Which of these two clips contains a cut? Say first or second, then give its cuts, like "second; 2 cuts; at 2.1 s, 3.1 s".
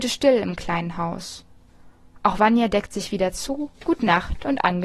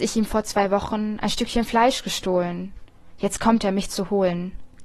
first; 1 cut; at 3.7 s